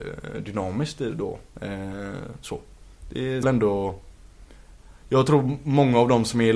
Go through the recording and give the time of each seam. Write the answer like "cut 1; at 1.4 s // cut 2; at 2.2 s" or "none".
cut 1; at 3.4 s